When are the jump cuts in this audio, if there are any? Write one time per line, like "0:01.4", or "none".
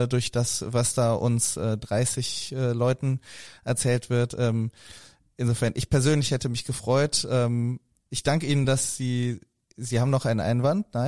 none